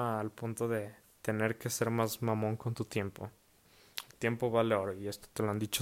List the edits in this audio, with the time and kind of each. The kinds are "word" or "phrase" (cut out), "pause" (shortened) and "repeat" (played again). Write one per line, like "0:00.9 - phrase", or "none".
0:01.0 - pause